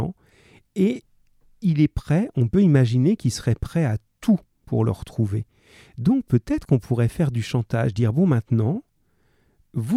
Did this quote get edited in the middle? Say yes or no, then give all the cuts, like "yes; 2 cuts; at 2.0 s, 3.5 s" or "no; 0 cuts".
no; 0 cuts